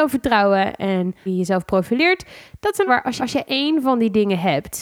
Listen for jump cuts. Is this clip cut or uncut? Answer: cut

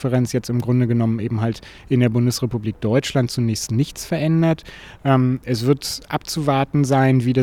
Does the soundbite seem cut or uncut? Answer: uncut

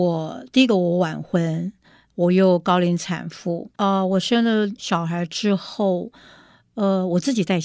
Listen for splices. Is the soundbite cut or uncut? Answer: cut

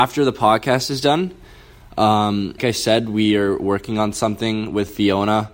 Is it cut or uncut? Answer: cut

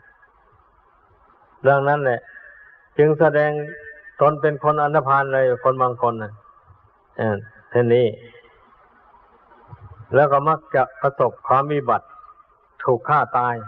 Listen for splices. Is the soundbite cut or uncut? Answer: cut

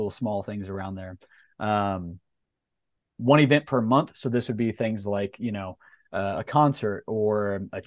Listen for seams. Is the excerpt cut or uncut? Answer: uncut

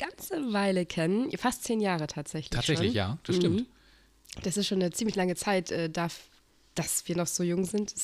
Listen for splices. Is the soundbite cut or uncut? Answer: uncut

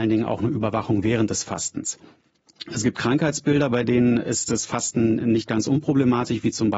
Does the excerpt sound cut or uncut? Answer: uncut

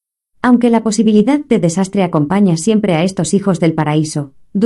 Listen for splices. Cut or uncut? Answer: uncut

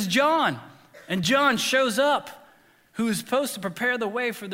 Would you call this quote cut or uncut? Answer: uncut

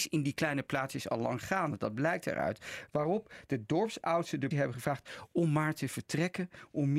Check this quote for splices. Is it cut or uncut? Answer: cut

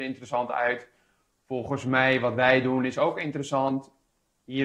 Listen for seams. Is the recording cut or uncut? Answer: uncut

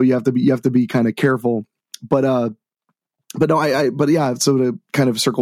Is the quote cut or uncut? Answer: uncut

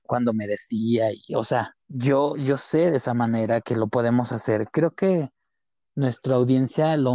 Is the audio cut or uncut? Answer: cut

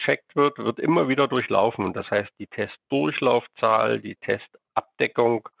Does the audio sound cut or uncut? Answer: uncut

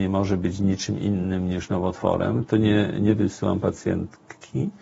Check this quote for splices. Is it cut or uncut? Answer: uncut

